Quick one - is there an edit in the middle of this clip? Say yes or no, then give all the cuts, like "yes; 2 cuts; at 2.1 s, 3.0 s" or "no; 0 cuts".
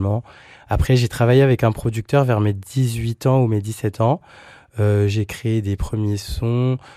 no; 0 cuts